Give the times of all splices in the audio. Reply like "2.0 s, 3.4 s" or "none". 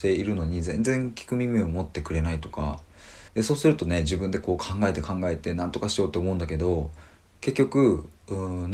3.3 s